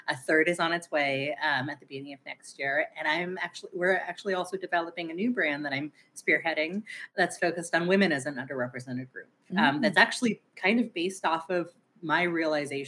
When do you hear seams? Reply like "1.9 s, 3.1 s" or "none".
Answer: none